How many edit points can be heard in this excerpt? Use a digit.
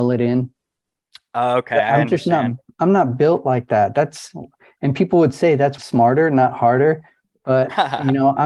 1